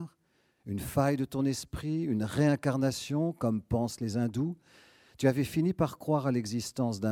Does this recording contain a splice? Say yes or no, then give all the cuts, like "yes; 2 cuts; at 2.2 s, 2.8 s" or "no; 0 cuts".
no; 0 cuts